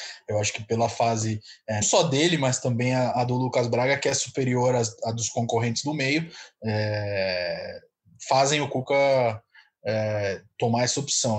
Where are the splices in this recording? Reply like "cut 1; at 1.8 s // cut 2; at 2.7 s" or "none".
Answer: cut 1; at 1.8 s